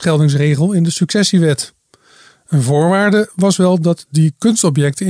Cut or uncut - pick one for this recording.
uncut